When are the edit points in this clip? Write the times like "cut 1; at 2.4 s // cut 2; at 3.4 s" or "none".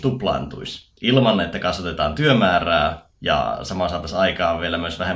cut 1; at 1.0 s // cut 2; at 3.1 s